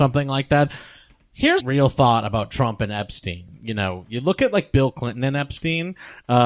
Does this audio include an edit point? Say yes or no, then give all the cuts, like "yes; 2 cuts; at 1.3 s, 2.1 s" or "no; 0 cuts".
yes; 1 cut; at 1.6 s